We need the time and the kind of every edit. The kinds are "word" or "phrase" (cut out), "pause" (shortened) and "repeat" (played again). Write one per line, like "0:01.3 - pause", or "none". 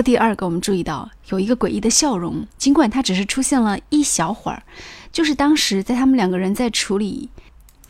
0:02.5 - pause